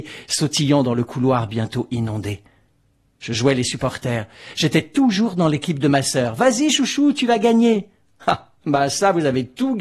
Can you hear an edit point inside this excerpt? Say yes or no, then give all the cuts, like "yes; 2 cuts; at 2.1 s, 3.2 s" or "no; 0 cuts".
no; 0 cuts